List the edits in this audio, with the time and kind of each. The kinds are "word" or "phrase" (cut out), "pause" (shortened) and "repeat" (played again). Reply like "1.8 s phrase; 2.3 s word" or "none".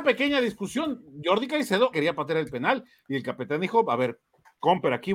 1.9 s word